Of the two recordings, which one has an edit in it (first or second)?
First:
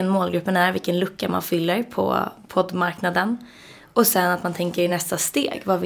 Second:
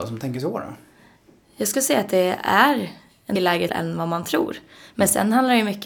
second